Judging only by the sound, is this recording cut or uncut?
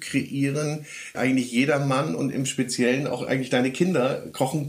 cut